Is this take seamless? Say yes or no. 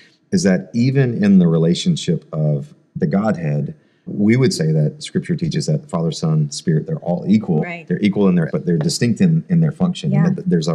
no